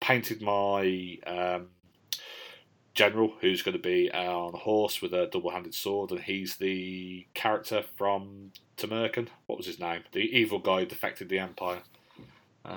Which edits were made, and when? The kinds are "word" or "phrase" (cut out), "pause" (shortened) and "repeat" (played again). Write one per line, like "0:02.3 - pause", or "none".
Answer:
0:10.1 - pause